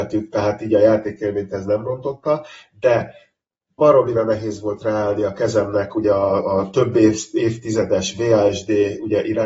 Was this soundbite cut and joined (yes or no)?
no